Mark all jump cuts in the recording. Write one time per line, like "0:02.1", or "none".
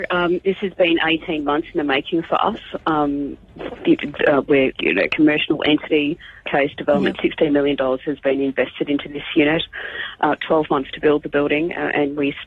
0:04.8
0:06.4